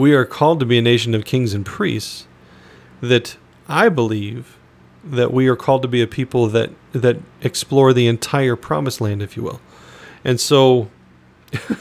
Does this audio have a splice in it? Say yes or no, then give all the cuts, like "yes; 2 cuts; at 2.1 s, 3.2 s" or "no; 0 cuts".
no; 0 cuts